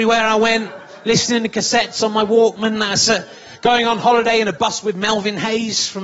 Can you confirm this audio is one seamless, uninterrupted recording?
yes; 0 cuts

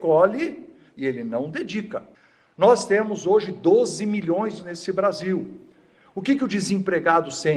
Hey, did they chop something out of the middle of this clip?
yes; 2 cuts; at 2.1 s, 4.6 s

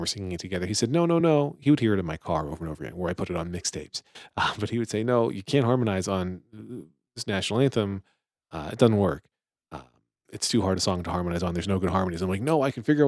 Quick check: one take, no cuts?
yes; 0 cuts

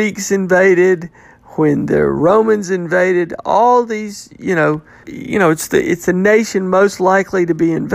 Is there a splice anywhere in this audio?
yes; 1 cut; at 5.0 s

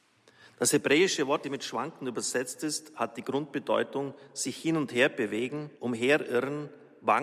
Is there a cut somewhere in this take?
yes; 2 cuts; at 1.4 s, 5.8 s

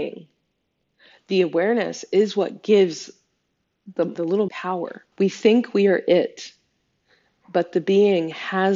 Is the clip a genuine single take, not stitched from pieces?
no; 3 cuts; at 4.1 s, 4.5 s, 5.1 s

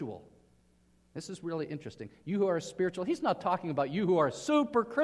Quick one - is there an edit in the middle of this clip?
no; 0 cuts

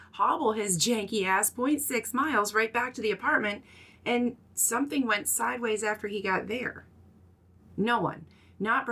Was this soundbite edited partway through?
no; 0 cuts

